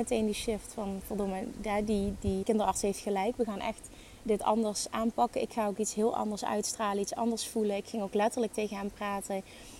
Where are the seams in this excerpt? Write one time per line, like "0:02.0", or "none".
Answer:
0:02.4